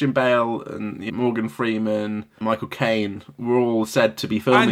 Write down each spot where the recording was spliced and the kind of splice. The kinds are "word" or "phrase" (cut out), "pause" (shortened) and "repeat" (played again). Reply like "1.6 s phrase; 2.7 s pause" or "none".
1.1 s word